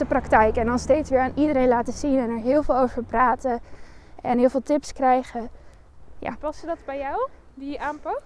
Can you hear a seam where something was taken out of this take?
no; 0 cuts

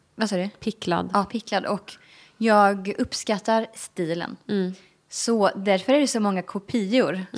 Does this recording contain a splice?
yes; 1 cut; at 1.3 s

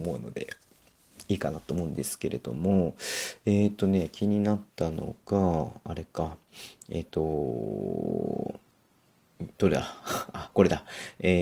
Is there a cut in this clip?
yes; 2 cuts; at 4.7 s, 9.5 s

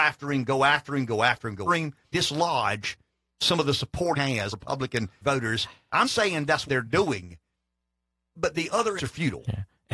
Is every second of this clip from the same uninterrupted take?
no; 9 cuts; at 1.7 s, 2.1 s, 4.1 s, 4.5 s, 5.2 s, 6.0 s, 6.7 s, 8.4 s, 9.0 s

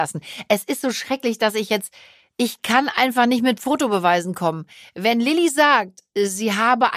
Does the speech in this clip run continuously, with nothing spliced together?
yes; 0 cuts

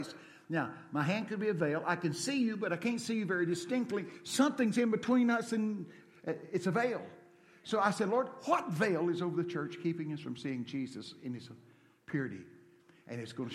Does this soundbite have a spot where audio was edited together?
no; 0 cuts

